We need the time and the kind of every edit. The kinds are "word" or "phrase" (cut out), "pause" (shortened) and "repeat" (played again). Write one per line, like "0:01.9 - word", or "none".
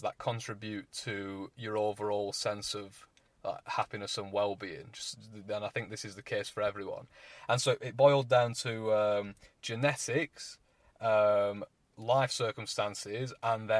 none